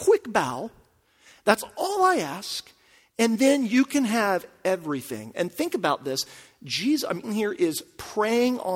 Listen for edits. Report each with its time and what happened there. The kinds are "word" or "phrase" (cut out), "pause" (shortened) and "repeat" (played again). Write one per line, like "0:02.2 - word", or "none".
0:07.2 - phrase